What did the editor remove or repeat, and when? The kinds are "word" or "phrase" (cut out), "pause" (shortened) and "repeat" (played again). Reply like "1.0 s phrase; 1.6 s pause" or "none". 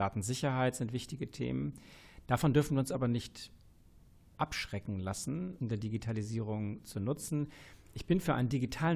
5.6 s phrase